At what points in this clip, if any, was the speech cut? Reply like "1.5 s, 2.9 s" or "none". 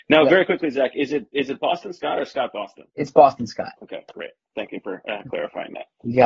2.9 s, 3.8 s